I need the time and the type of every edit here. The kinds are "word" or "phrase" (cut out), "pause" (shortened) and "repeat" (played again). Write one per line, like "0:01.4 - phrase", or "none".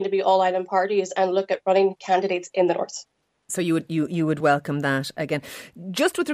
none

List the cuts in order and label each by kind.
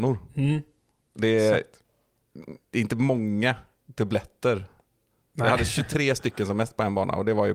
none

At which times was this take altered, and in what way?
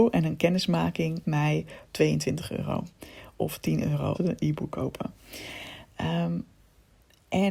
0:01.2 - word
0:01.8 - word
0:04.1 - word

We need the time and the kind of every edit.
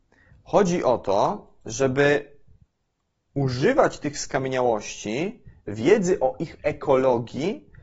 none

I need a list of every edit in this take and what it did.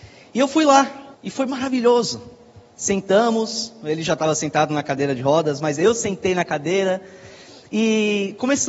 0:01.1 - pause

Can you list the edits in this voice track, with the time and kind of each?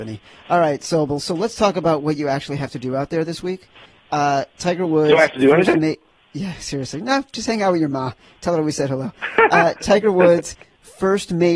none

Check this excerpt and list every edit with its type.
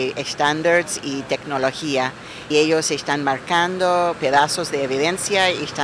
0:02.5 - word
0:04.1 - word

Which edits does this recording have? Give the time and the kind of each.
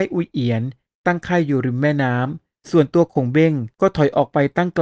0:03.7 - pause

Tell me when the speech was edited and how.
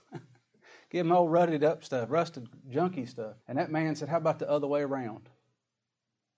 0:03.4 - pause

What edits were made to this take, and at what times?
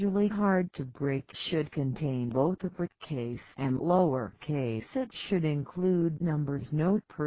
none

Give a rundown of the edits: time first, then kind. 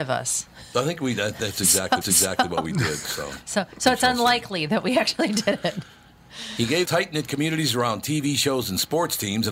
0:02.0 - repeat
0:06.8 - phrase

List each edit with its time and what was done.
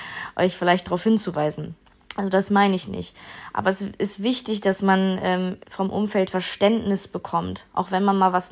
0:05.6 - pause

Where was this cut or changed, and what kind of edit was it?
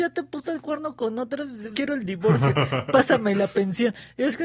0:01.7 - phrase

